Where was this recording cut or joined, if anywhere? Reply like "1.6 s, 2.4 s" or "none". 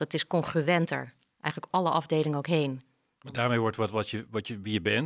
1.7 s